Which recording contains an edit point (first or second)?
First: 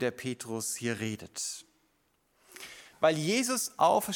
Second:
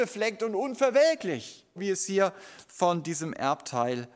second